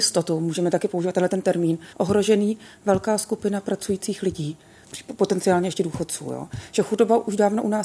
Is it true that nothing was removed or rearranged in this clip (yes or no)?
no